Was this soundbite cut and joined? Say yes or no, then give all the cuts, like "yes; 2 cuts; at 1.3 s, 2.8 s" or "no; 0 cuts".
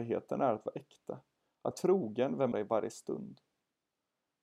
yes; 2 cuts; at 1.7 s, 2.5 s